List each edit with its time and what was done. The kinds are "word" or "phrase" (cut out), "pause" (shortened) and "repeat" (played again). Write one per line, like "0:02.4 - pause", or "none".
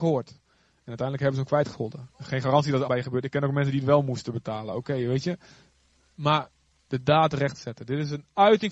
0:02.1 - pause
0:02.9 - word